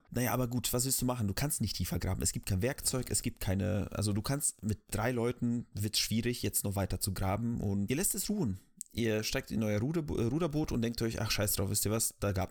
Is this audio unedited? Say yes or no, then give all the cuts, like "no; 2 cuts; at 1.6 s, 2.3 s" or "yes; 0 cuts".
yes; 0 cuts